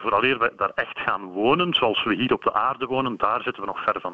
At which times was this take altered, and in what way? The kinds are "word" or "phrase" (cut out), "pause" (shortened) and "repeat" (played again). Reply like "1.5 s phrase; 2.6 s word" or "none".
none